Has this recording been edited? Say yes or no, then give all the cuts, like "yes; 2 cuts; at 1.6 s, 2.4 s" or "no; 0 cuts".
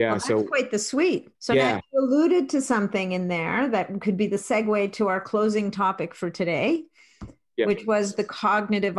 yes; 1 cut; at 1.3 s